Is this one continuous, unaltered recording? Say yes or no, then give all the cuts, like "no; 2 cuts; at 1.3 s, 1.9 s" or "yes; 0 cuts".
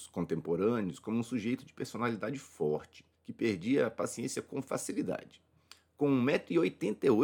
no; 1 cut; at 3.1 s